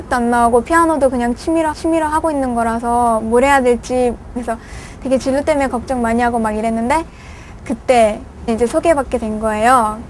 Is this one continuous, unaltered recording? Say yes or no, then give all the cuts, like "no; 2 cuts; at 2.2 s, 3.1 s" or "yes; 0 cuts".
no; 3 cuts; at 1.7 s, 4.4 s, 8.5 s